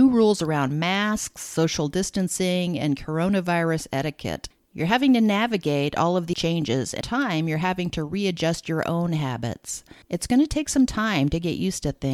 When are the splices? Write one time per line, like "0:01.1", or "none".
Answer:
0:06.3
0:07.0
0:10.0